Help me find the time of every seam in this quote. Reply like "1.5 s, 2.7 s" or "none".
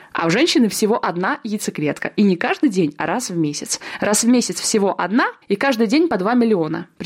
5.4 s